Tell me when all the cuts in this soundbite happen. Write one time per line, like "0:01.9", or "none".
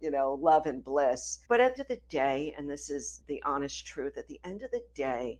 0:01.4
0:01.8
0:03.2